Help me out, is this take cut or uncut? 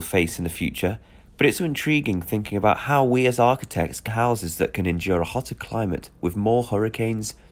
cut